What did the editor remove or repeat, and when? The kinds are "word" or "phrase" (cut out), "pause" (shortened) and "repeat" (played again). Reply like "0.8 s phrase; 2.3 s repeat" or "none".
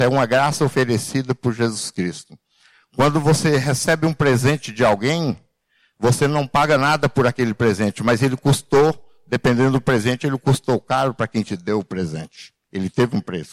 none